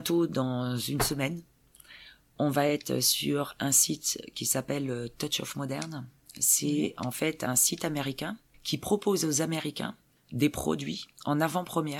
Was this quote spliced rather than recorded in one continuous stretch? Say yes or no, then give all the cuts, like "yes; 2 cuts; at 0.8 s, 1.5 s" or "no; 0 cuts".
no; 0 cuts